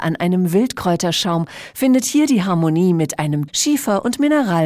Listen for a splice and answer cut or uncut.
cut